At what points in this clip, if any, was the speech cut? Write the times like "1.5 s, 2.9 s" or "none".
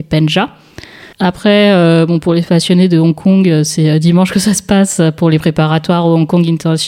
1.1 s